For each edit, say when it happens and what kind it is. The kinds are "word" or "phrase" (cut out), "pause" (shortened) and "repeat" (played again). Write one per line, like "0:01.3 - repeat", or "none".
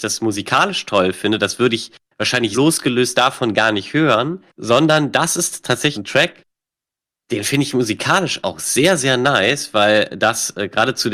0:02.5 - word
0:04.6 - word
0:05.9 - word
0:08.4 - word

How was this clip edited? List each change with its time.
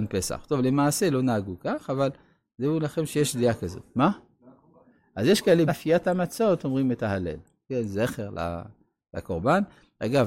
0:05.7 - word

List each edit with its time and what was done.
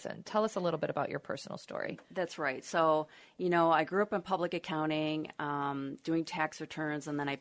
none

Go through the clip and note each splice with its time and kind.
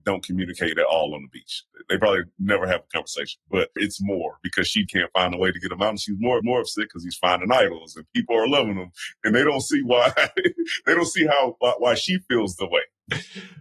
0:03.8 - phrase
0:04.9 - word
0:06.4 - repeat

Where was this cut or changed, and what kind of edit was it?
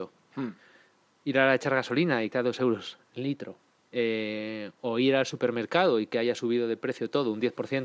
0:02.3 - word
0:03.8 - pause

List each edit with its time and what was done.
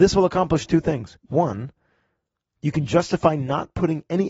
0:01.2 - pause

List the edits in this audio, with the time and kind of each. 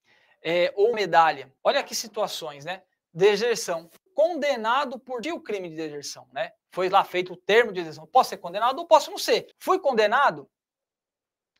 0:00.9 - word
0:01.6 - pause
0:04.1 - word
0:05.2 - phrase
0:06.6 - pause
0:09.5 - pause

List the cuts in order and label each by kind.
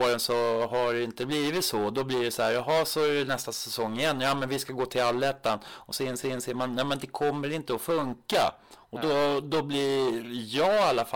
0:06.2 - repeat

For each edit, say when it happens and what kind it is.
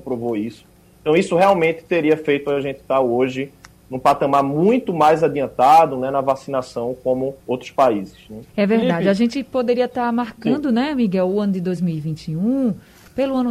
0:07.4 - pause
0:08.5 - pause

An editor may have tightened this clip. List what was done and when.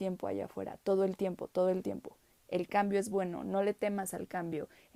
none

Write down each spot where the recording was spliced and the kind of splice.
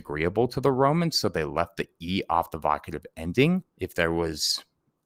0:03.7 - pause

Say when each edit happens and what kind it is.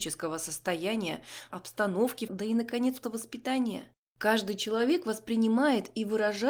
0:01.5 - word
0:02.3 - phrase
0:03.0 - word

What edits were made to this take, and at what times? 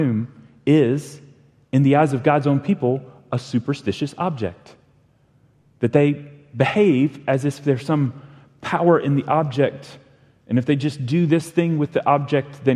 none

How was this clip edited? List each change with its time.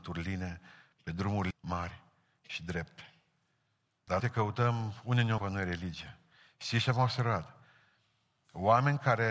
0:01.5 - word
0:04.2 - word
0:05.4 - word

